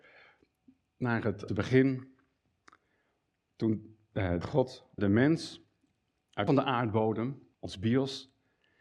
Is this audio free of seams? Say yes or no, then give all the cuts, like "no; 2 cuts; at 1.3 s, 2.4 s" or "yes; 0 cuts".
no; 5 cuts; at 1.5 s, 4.4 s, 5.0 s, 6.5 s, 7.5 s